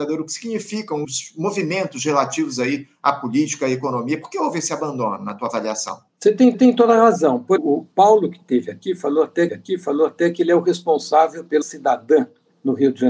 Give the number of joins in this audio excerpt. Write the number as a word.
six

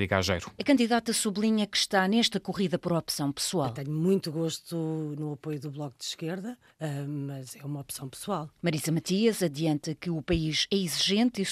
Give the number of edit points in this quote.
one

